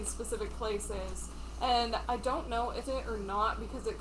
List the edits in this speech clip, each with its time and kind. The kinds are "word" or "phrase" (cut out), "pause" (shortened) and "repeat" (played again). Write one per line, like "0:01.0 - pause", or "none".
0:02.0 - word
0:02.8 - phrase